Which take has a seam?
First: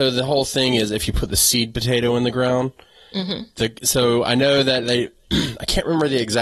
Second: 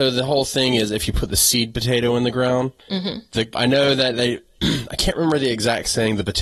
second; 2 cuts; at 2.8 s, 3.5 s

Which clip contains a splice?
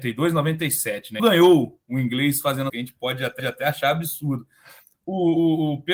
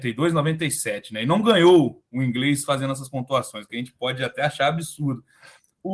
first; 3 cuts; at 1.2 s, 2.7 s, 3.4 s

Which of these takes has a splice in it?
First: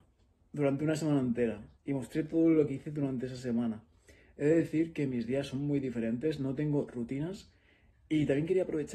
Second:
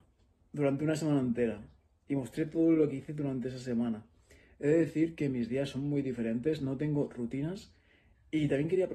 first; 1 cut; at 1.8 s

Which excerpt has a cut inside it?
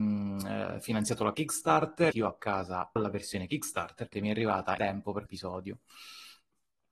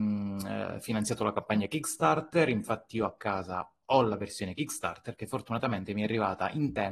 first; 6 cuts; at 1.3 s, 2.1 s, 3.0 s, 4.1 s, 4.8 s, 5.3 s

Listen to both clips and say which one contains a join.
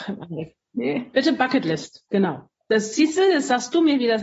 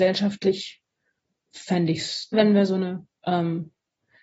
second; 1 cut; at 2.3 s

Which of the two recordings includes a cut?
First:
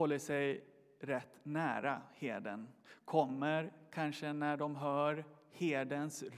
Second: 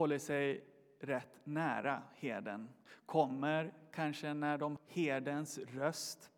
second; 1 cut; at 4.8 s

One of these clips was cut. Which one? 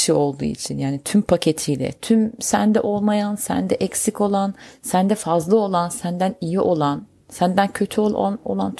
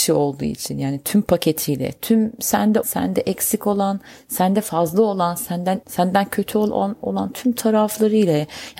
second; 2 cuts; at 2.8 s, 5.8 s

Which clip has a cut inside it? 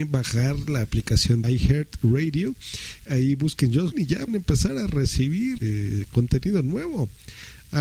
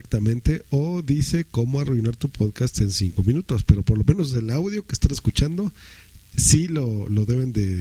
first; 5 cuts; at 1.4 s, 3.1 s, 3.9 s, 4.3 s, 5.6 s

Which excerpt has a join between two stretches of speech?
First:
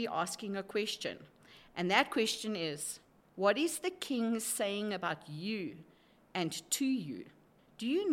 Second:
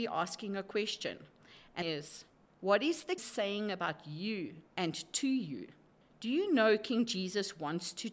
second; 3 cuts; at 1.8 s, 3.2 s, 4.7 s

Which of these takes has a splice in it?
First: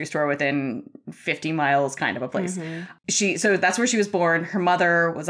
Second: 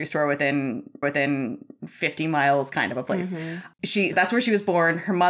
second; 2 cuts; at 1.0 s, 4.1 s

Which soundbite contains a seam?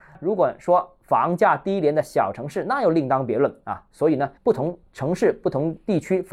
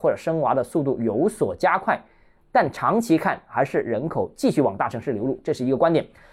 first; 1 cut; at 4.4 s

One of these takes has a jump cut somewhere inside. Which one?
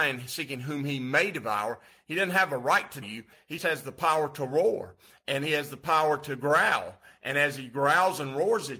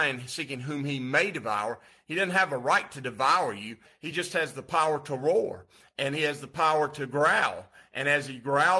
first; 2 cuts; at 3.0 s, 3.6 s

